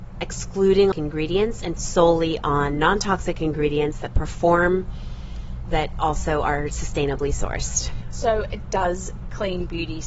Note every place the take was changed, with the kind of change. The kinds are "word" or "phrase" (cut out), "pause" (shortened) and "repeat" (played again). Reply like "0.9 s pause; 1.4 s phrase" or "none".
0.9 s phrase; 1.8 s word; 5.6 s word